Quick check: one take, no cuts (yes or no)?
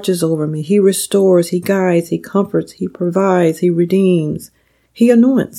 yes